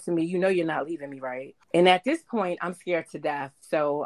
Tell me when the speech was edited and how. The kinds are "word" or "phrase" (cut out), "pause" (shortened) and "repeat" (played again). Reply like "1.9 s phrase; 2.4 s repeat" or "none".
1.6 s pause